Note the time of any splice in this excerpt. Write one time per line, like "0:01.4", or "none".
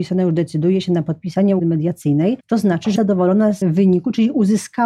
0:01.6
0:02.4
0:03.0
0:03.6